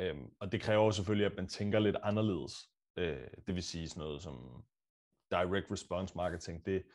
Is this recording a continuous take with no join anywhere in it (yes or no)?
yes